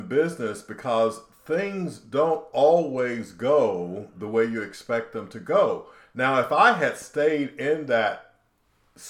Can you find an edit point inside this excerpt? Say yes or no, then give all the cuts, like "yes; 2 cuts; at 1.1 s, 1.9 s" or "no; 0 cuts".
no; 0 cuts